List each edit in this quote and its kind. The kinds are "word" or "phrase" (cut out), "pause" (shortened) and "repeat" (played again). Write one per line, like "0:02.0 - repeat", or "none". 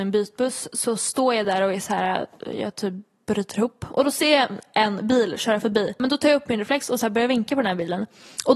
none